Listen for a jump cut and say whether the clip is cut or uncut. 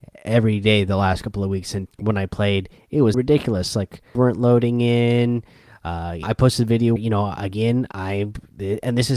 cut